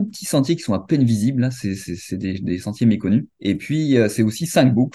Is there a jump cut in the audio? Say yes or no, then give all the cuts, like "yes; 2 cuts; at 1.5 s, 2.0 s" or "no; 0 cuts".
yes; 1 cut; at 3.3 s